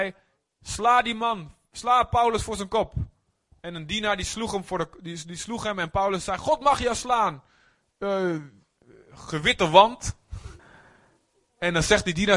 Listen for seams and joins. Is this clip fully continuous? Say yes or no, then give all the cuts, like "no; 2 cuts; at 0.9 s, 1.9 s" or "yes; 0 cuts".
no; 1 cut; at 10.6 s